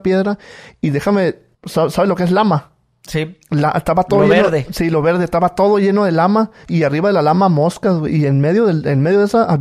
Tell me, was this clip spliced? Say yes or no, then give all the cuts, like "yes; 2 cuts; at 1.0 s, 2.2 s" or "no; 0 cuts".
yes; 1 cut; at 1.5 s